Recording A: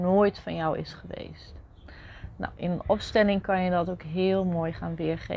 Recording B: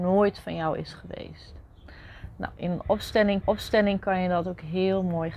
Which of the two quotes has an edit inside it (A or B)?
B